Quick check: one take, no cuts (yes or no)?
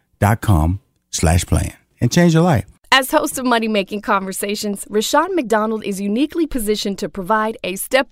yes